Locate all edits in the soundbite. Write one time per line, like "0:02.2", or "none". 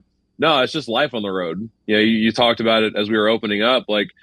none